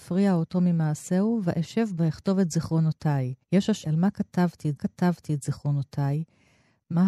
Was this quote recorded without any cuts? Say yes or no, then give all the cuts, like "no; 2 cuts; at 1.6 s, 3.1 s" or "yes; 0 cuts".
no; 4 cuts; at 2.0 s, 3.4 s, 3.8 s, 4.8 s